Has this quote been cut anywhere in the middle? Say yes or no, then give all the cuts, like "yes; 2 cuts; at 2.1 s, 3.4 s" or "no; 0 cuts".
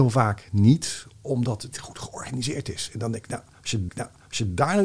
yes; 2 cuts; at 1.7 s, 3.9 s